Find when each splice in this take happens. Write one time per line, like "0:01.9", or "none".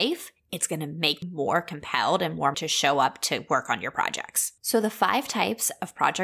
0:01.2
0:02.5
0:04.6